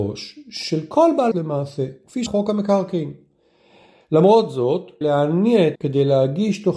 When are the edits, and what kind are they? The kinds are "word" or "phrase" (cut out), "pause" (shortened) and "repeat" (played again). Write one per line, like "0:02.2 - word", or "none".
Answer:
0:01.3 - word
0:02.3 - word
0:05.0 - word
0:05.7 - word

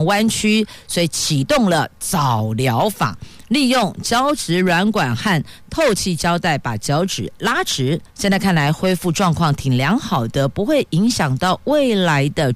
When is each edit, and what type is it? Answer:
0:08.1 - pause

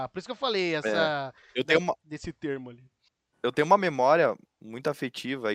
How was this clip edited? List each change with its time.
0:03.1 - pause

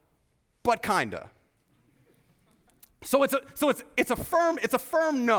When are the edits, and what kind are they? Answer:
none

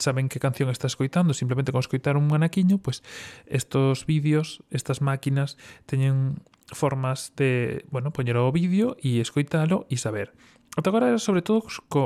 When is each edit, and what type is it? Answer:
none

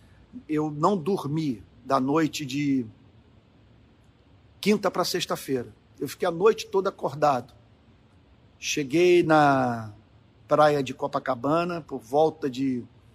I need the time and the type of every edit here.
none

